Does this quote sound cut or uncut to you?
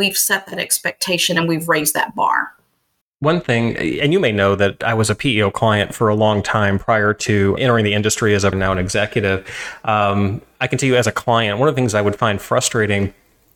cut